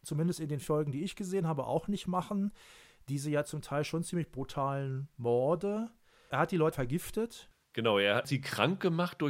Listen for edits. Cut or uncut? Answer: cut